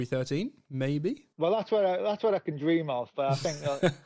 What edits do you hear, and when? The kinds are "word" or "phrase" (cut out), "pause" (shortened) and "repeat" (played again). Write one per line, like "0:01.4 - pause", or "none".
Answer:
0:01.3 - pause